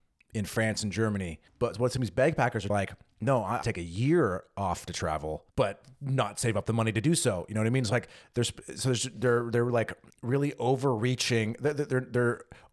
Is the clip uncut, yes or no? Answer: no